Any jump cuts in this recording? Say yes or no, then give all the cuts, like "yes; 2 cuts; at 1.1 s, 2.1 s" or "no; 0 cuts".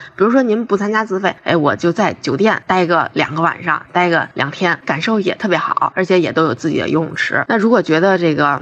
yes; 1 cut; at 4.8 s